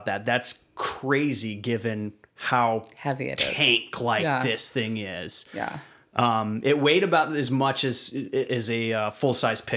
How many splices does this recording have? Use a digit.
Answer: 0